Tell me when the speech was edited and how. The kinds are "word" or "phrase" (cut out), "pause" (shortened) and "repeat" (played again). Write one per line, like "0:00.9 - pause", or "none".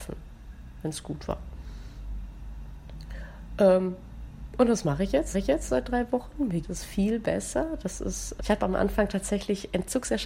0:05.3 - repeat
0:06.6 - word
0:08.4 - word